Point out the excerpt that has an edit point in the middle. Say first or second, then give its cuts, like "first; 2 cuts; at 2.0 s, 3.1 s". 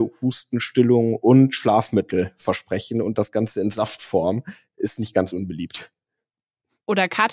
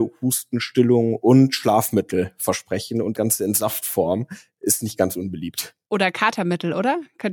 second; 2 cuts; at 3.1 s, 5.8 s